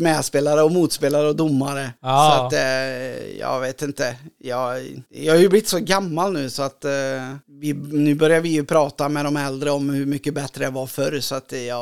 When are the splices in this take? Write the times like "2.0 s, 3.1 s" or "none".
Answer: 2.0 s, 5.1 s, 7.4 s